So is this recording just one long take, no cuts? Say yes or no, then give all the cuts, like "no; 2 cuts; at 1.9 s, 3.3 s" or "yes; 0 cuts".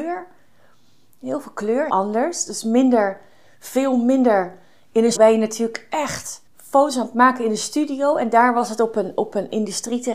no; 3 cuts; at 1.9 s, 5.1 s, 6.5 s